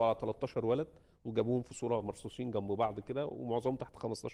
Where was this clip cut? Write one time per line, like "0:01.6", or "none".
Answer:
none